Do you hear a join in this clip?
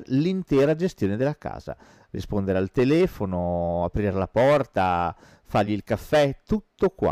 no; 0 cuts

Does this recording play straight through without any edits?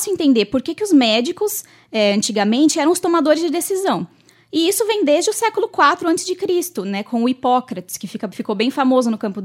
yes; 0 cuts

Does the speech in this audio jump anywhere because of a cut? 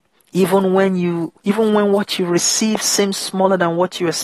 yes; 1 cut; at 1.4 s

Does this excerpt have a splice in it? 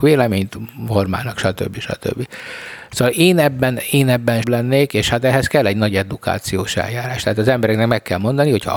yes; 1 cut; at 4.4 s

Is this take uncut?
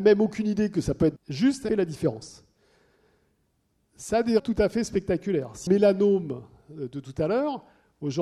no; 4 cuts; at 1.2 s, 1.7 s, 4.4 s, 5.7 s

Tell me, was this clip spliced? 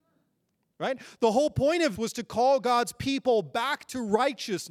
yes; 1 cut; at 2.0 s

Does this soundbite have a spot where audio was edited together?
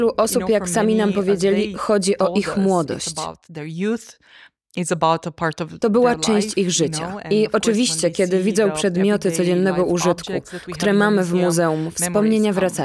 no; 0 cuts

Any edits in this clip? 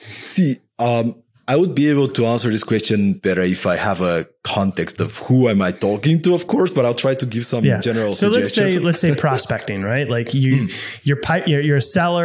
yes; 1 cut; at 3.2 s

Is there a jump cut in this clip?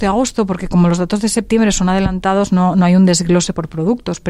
no; 0 cuts

